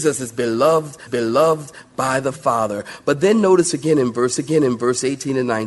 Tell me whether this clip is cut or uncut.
cut